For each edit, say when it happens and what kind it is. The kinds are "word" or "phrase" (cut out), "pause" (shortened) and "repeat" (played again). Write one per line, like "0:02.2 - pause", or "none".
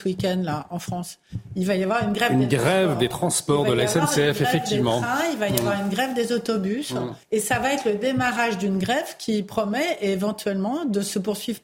0:07.2 - pause